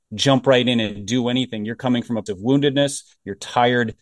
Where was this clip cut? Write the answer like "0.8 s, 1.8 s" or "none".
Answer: 2.3 s